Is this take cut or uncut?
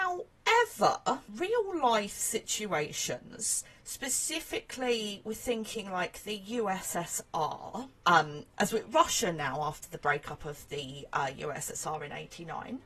uncut